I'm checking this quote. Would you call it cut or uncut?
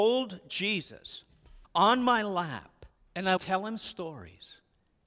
cut